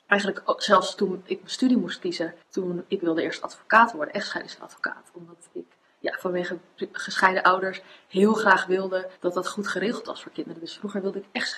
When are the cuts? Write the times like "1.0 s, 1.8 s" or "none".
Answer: 2.4 s, 9.2 s